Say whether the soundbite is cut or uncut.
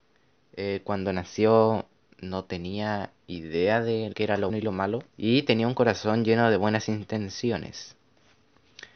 cut